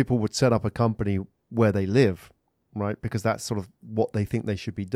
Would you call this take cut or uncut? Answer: uncut